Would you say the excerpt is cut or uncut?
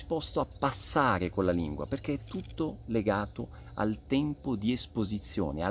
uncut